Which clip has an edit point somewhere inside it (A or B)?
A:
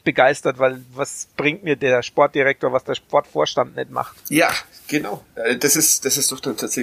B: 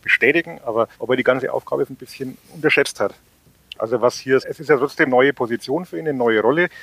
B